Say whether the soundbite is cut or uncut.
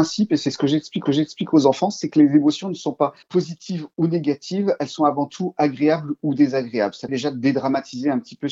cut